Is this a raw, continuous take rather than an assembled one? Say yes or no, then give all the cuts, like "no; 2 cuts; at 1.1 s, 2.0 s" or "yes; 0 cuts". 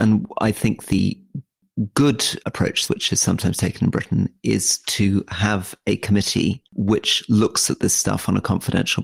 no; 3 cuts; at 2.4 s, 2.9 s, 6.7 s